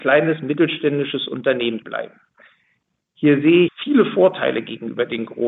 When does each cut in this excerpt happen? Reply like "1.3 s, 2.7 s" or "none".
1.8 s, 3.7 s